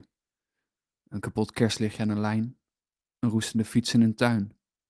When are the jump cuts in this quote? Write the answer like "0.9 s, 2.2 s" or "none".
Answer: none